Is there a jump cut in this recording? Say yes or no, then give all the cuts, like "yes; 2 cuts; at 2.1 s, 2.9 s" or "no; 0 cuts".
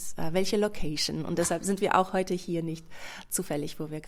no; 0 cuts